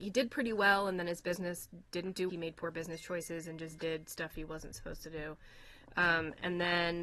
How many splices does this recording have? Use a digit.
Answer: 1